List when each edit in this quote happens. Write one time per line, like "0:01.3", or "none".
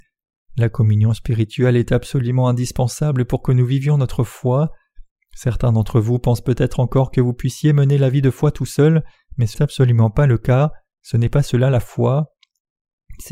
0:09.5

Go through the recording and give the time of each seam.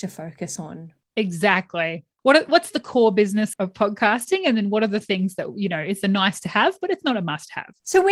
0:03.5

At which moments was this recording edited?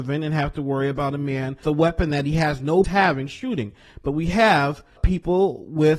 0:01.6
0:02.8
0:05.0

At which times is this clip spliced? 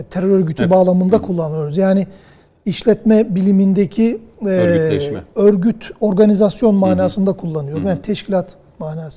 none

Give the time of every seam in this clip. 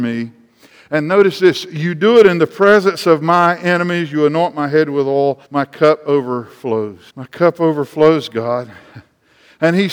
0:05.4
0:07.1

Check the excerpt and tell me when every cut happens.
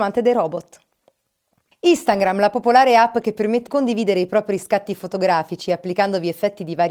0:03.7

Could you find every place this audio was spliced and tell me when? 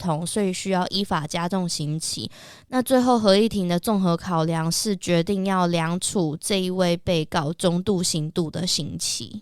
none

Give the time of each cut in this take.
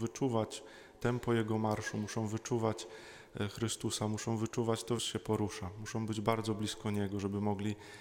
0:05.0

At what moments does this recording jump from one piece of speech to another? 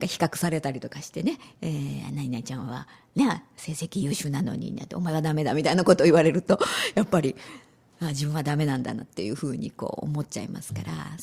none

